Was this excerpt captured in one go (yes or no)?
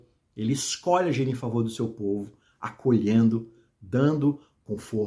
yes